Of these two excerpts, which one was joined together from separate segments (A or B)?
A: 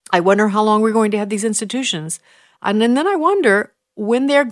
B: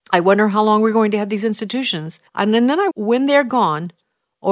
B